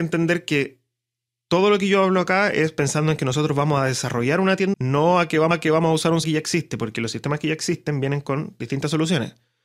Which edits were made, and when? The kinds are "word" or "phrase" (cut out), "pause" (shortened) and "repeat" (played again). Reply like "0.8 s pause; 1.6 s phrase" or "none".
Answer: 4.7 s word; 5.5 s repeat; 6.2 s word